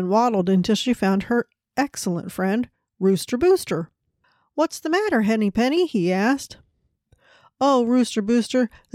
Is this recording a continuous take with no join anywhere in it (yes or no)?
yes